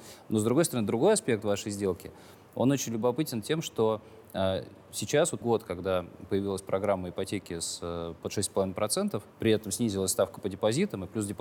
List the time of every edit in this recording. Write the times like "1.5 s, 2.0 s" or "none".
5.4 s, 9.3 s